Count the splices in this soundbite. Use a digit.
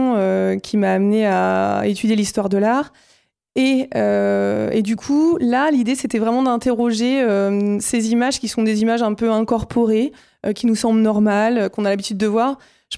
0